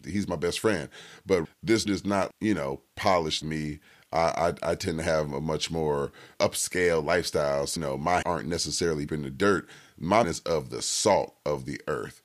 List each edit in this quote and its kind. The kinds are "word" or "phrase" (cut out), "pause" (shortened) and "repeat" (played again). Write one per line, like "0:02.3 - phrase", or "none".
0:01.4 - word
0:01.9 - word
0:02.3 - word
0:03.4 - word
0:06.3 - word
0:07.8 - word
0:08.2 - word
0:09.1 - word
0:10.2 - word